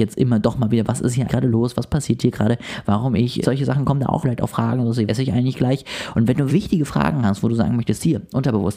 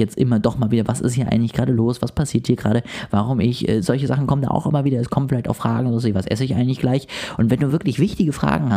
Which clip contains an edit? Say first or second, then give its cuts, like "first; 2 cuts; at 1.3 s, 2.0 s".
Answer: first; 5 cuts; at 1.3 s, 3.4 s, 4.2 s, 5.1 s, 6.5 s